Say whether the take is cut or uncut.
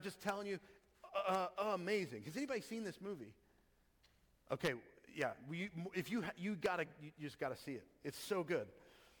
uncut